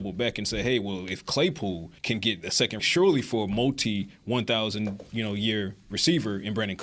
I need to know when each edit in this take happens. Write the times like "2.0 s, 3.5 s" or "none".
2.0 s, 2.8 s